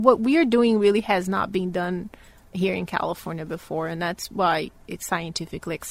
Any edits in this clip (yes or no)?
no